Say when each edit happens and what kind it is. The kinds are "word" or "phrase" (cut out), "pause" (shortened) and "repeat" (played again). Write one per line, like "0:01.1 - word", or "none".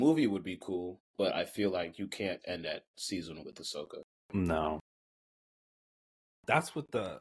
0:01.1 - pause
0:02.4 - word
0:03.4 - word

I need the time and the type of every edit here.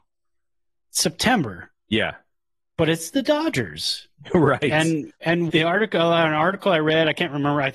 0:05.5 - phrase

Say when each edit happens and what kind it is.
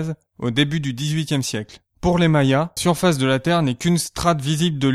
0:01.9 - pause
0:02.8 - word

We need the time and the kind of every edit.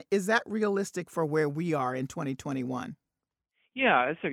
none

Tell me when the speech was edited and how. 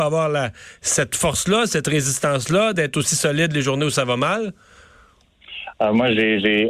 none

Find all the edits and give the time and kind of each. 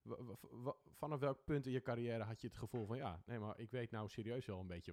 none

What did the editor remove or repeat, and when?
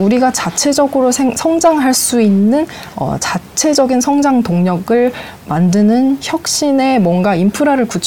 none

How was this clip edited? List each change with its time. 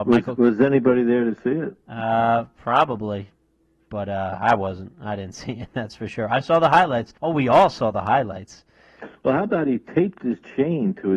0:07.2 - pause

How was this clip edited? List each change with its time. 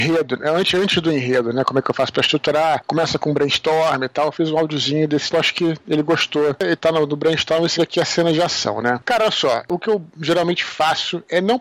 0:05.3 - word
0:07.8 - word

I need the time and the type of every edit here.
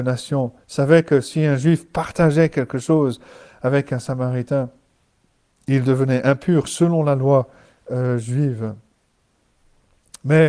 none

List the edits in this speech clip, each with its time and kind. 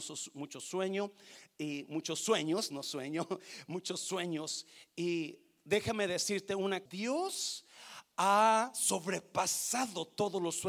0:06.9 - word

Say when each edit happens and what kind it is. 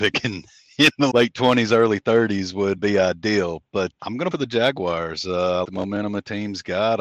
0:01.1 - word
0:02.8 - word
0:04.0 - word
0:04.3 - phrase
0:05.6 - word

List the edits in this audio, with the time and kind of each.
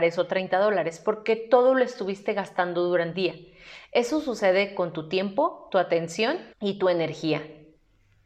0:03.1 - word
0:06.5 - pause

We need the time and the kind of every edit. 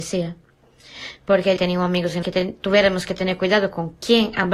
0:01.6 - phrase
0:02.2 - phrase

